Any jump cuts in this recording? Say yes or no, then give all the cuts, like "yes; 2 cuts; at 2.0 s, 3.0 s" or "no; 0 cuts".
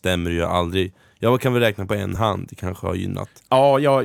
no; 0 cuts